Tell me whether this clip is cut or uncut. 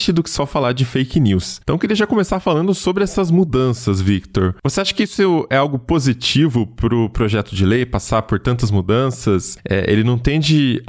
uncut